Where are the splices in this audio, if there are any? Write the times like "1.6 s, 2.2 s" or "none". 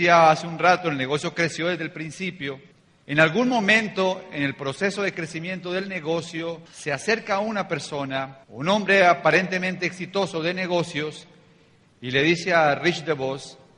2.7 s, 6.7 s, 8.4 s